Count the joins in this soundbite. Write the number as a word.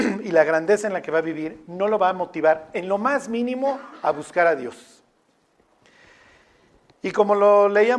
zero